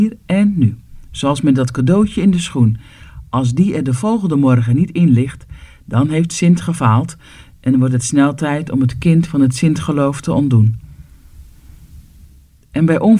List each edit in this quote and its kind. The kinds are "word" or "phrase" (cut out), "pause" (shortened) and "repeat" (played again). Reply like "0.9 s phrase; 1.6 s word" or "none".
none